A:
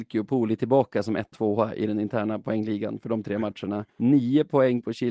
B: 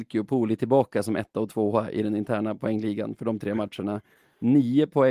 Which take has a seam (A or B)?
A